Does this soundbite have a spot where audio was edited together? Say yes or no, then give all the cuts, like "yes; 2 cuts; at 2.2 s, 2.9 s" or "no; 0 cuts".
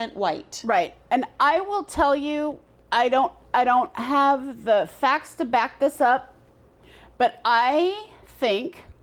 no; 0 cuts